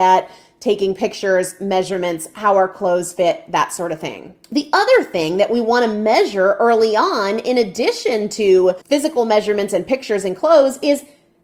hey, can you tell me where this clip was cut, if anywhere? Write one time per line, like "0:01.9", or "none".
0:04.4
0:08.8